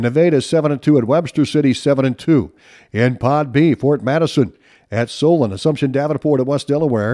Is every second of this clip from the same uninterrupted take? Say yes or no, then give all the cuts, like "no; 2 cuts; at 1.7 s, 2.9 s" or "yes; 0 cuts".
yes; 0 cuts